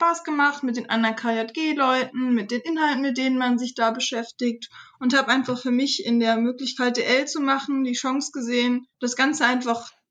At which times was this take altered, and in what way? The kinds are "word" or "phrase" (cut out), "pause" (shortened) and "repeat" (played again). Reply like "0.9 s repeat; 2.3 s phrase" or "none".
8.9 s pause

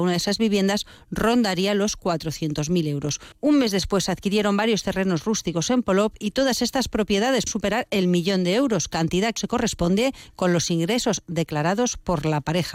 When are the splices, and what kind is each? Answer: 7.5 s word; 9.4 s word

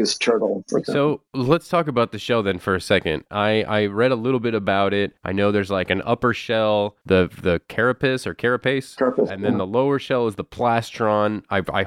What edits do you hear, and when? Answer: 5.2 s pause; 7.0 s pause

